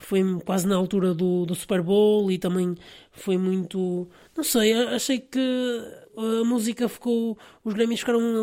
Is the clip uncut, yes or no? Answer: no